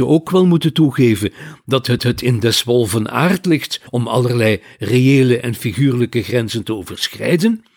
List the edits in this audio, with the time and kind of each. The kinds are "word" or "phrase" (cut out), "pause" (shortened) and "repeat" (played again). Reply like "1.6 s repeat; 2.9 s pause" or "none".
2.0 s repeat; 3.9 s pause